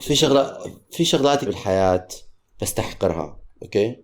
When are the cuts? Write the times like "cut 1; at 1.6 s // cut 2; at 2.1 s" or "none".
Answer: cut 1; at 1.5 s